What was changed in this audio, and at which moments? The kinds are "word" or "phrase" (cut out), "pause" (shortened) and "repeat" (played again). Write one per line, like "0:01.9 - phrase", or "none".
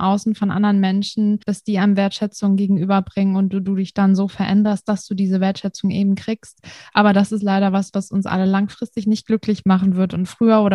0:01.4 - pause